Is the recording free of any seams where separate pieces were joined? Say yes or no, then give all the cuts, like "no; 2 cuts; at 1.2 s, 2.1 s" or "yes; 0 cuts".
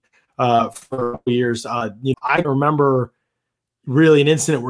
no; 2 cuts; at 2.1 s, 2.4 s